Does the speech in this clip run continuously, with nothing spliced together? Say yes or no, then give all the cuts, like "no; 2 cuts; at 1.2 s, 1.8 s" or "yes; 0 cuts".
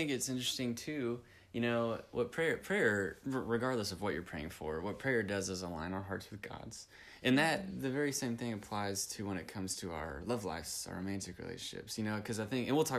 yes; 0 cuts